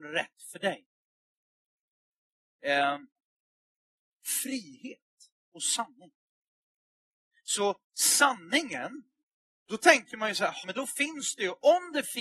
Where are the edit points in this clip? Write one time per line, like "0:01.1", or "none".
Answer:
0:05.4
0:10.6